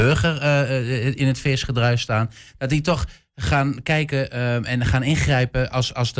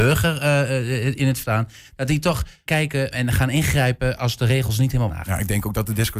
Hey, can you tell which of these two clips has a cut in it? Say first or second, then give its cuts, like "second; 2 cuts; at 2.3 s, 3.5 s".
second; 5 cuts; at 1.4 s, 2.7 s, 3.1 s, 4.2 s, 5.1 s